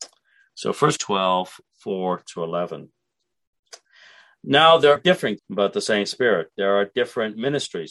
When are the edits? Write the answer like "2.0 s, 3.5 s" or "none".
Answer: 1.0 s, 5.0 s, 5.4 s